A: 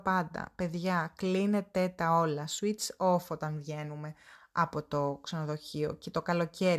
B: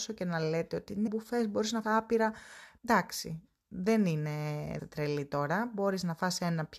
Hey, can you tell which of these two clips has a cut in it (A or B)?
B